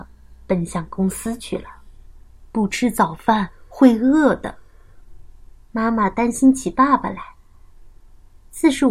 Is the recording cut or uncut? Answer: uncut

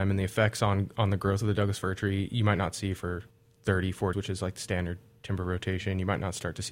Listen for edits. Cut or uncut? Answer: cut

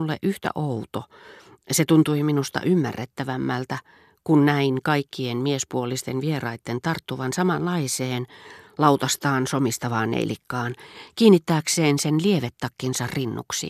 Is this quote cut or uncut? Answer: uncut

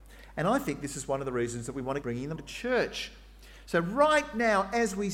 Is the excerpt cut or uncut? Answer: cut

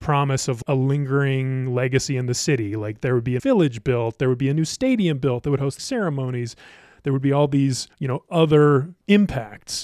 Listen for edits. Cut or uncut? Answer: cut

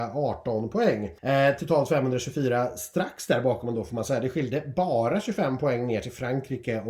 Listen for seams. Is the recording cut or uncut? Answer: cut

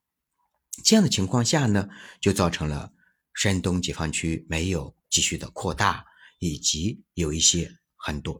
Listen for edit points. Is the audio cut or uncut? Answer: uncut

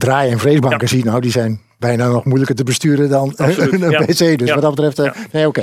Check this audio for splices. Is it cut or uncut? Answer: uncut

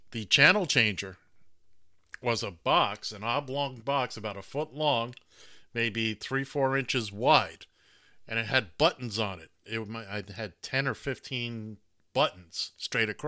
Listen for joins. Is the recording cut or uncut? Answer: uncut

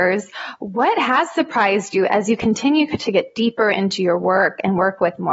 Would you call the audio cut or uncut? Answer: uncut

